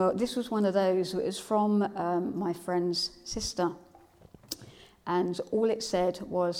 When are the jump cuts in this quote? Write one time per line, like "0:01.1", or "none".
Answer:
none